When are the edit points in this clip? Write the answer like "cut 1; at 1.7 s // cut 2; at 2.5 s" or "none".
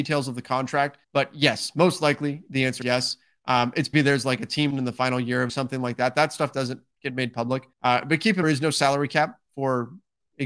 cut 1; at 1.0 s // cut 2; at 2.8 s // cut 3; at 3.9 s // cut 4; at 4.7 s // cut 5; at 5.5 s // cut 6; at 7.7 s // cut 7; at 8.4 s